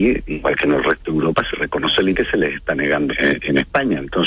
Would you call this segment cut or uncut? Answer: cut